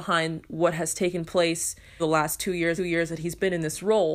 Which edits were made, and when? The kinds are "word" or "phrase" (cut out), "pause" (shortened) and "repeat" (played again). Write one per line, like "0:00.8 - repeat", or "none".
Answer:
0:02.0 - phrase
0:02.8 - repeat